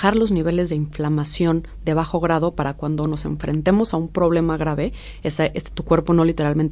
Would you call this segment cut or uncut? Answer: uncut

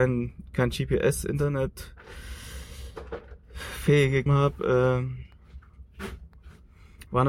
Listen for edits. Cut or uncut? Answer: cut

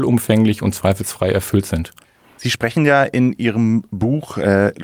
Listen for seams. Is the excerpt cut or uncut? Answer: uncut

